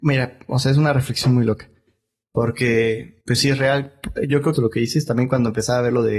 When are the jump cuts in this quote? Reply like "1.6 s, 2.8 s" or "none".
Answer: 3.2 s, 4.5 s